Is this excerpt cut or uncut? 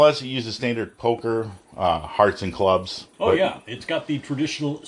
cut